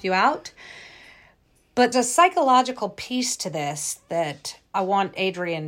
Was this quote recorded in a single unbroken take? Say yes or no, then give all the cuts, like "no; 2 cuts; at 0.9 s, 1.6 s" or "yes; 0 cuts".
no; 2 cuts; at 1.9 s, 4.7 s